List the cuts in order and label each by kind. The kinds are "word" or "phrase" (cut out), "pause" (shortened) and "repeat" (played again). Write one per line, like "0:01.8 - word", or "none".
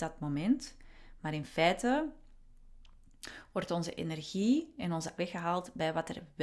0:05.2 - word